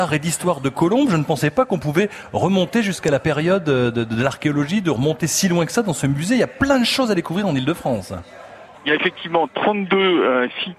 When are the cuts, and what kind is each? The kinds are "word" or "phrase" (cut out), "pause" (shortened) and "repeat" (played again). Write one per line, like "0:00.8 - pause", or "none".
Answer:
0:08.7 - pause